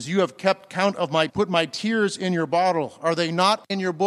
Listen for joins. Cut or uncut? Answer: cut